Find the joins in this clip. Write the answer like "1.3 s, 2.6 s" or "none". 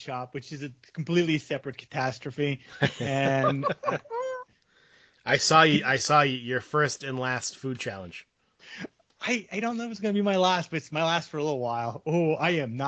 none